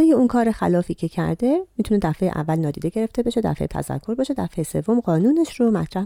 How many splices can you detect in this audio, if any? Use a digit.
1